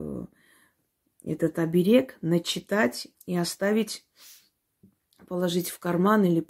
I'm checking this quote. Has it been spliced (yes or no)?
yes